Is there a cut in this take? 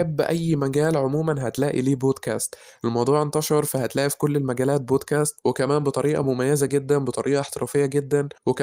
no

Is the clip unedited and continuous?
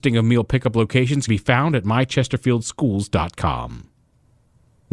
no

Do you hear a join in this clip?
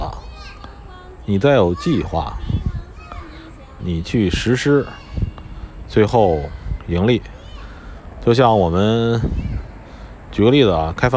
yes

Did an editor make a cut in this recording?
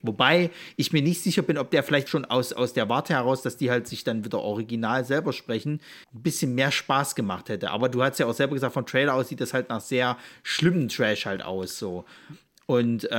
yes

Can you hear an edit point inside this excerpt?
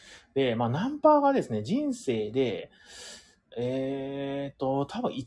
no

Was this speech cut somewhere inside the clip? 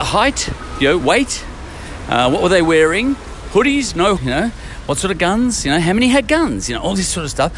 yes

